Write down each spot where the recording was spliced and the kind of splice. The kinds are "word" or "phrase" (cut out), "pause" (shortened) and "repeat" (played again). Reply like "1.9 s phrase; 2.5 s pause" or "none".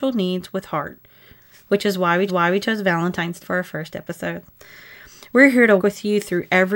2.3 s repeat; 3.4 s word; 5.8 s word